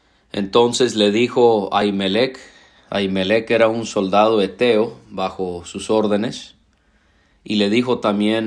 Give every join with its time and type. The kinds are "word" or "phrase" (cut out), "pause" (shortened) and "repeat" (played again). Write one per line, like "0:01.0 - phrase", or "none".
none